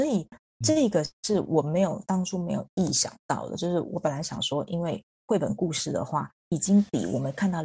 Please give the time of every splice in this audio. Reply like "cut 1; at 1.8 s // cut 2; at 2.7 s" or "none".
cut 1; at 1.1 s